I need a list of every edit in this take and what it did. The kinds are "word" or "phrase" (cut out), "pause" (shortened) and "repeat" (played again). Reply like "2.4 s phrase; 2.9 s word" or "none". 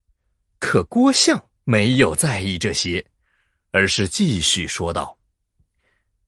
none